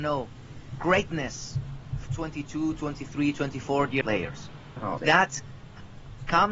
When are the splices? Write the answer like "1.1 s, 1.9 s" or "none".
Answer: 2.1 s, 4.0 s, 5.0 s